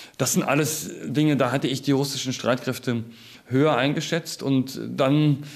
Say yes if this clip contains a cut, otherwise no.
no